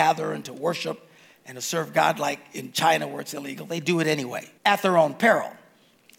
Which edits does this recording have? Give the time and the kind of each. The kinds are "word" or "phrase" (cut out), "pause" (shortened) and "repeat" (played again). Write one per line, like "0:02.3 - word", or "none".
0:04.6 - pause